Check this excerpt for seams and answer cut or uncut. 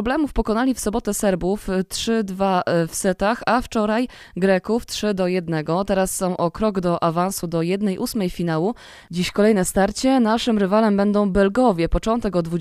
uncut